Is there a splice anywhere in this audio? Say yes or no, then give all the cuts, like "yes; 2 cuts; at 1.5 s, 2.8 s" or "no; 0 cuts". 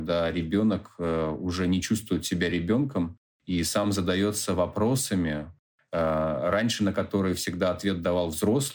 no; 0 cuts